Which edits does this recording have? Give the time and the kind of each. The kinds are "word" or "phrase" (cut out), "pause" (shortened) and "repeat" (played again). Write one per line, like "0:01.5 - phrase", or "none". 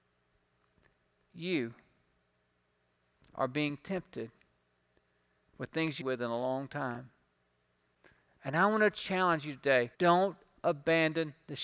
0:06.0 - phrase
0:09.9 - pause